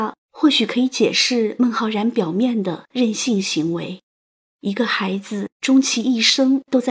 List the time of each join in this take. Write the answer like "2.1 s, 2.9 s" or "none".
4.1 s